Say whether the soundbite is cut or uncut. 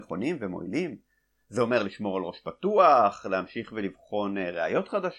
uncut